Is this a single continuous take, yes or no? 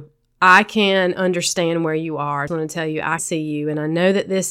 no